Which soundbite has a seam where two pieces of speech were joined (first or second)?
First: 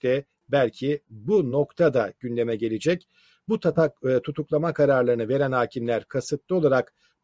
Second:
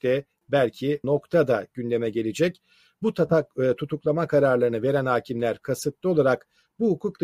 second